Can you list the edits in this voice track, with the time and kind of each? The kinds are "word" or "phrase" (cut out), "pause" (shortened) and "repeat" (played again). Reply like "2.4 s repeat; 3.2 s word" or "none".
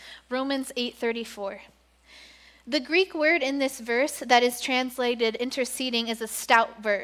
none